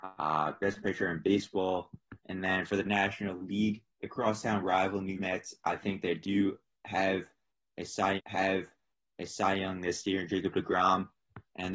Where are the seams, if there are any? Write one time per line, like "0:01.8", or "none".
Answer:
0:02.2
0:03.9
0:05.2
0:08.2

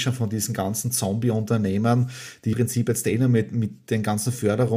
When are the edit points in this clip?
0:02.5

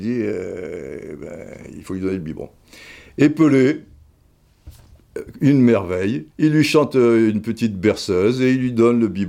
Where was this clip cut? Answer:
0:06.3

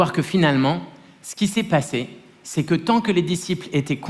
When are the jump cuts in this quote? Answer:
none

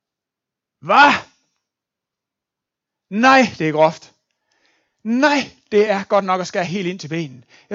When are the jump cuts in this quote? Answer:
none

